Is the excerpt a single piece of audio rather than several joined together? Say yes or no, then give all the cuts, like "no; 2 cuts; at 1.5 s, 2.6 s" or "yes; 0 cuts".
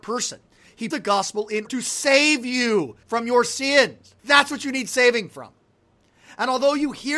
no; 4 cuts; at 0.9 s, 1.7 s, 3.0 s, 4.2 s